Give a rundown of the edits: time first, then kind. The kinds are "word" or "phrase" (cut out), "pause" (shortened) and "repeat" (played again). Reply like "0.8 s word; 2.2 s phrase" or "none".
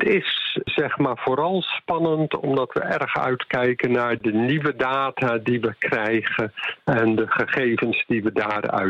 4.2 s word